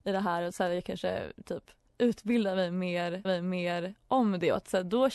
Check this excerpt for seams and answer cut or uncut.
cut